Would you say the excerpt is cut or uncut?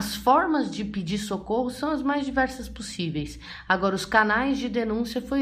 uncut